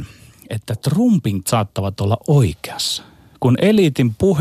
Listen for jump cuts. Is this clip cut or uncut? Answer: cut